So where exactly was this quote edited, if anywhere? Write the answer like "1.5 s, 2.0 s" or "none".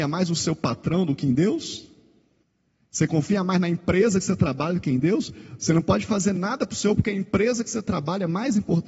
none